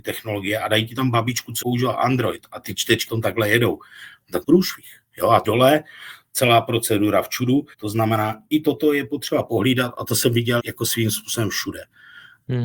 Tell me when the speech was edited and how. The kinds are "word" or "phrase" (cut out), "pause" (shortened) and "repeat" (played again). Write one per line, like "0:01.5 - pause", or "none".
0:01.6 - word
0:03.1 - word
0:04.4 - word
0:05.4 - phrase
0:07.7 - pause
0:10.6 - word

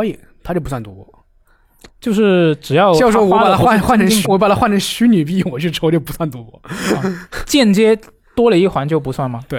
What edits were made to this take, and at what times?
0:04.2 - word

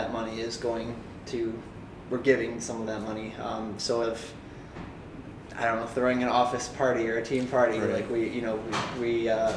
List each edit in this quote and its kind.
0:04.0 - word

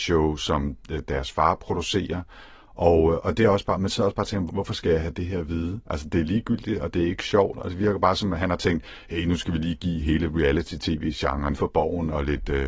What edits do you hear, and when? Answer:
0:04.5 - word
0:05.8 - pause
0:11.5 - phrase

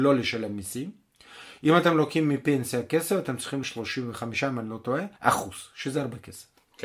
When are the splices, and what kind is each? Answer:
0:03.6 - word
0:05.2 - pause

